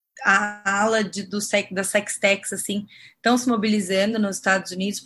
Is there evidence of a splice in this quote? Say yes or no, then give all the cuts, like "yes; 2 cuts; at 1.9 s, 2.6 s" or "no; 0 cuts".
no; 0 cuts